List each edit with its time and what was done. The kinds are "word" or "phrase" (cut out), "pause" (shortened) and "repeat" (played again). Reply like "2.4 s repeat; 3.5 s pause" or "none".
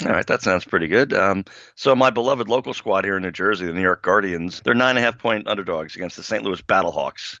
4.6 s word